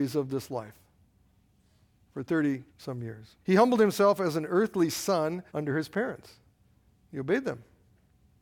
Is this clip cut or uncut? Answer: cut